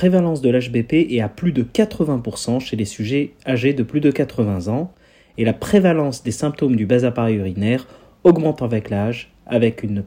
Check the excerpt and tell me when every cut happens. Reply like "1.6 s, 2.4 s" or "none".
none